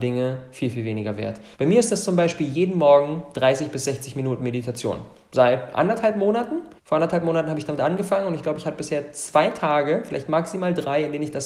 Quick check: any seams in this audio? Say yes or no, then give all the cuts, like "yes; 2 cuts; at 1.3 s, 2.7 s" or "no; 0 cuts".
yes; 2 cuts; at 1.5 s, 6.8 s